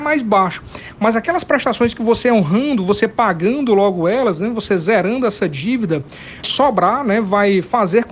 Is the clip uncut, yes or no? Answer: no